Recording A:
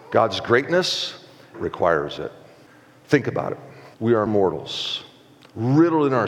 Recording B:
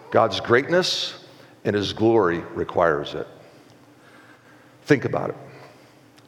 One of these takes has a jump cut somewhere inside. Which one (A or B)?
A